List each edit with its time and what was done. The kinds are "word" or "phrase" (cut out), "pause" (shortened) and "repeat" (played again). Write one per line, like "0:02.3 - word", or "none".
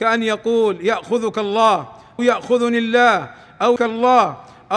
0:02.2 - word
0:03.8 - word

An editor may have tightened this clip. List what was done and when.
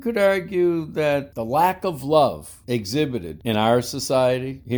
none

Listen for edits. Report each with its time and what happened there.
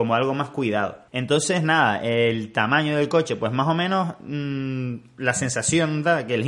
0:01.1 - pause

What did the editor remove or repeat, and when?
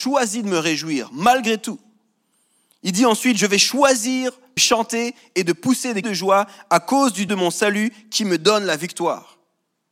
0:04.6 - word
0:06.0 - word
0:07.3 - word

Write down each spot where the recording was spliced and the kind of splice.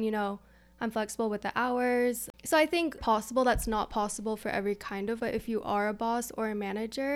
0:02.4 - pause
0:03.0 - word
0:05.2 - word

